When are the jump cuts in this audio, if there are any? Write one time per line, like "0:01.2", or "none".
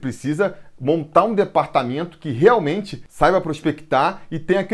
none